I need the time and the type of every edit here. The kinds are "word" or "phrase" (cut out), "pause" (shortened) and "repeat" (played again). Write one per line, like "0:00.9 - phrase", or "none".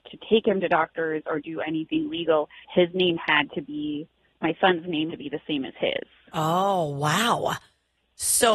0:02.6 - pause
0:05.1 - word